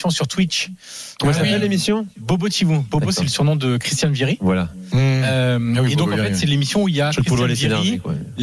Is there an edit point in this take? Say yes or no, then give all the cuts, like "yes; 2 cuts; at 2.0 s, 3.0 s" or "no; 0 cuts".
no; 0 cuts